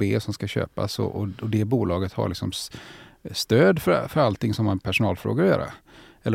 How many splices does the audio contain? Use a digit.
0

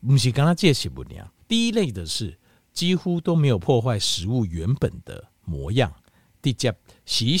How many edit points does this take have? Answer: 1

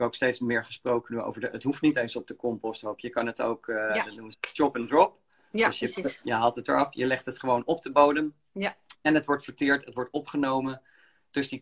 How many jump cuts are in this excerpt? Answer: 0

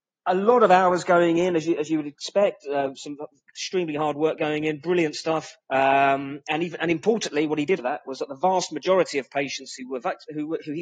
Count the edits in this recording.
2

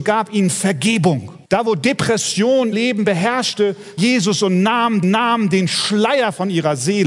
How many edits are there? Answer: 4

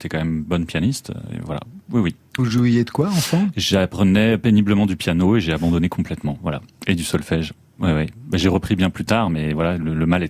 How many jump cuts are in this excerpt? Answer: 1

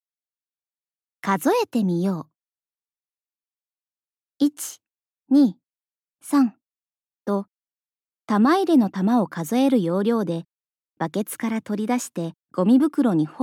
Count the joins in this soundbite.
1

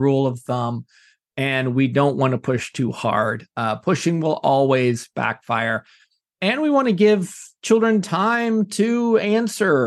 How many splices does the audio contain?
0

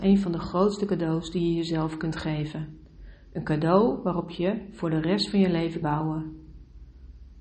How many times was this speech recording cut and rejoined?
1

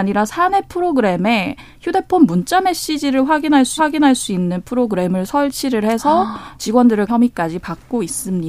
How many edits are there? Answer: 2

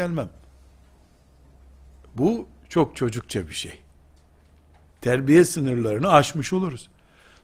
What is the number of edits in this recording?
0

